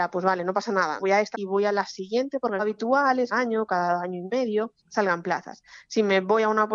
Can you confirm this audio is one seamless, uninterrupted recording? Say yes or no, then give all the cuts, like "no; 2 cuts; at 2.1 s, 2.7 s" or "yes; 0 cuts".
no; 5 cuts; at 1.0 s, 1.3 s, 2.6 s, 3.3 s, 4.8 s